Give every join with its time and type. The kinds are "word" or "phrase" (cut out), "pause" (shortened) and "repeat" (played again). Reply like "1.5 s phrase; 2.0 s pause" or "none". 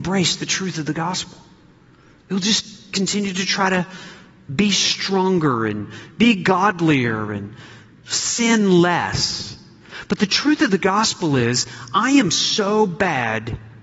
none